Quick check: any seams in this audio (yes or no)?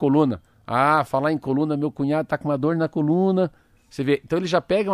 no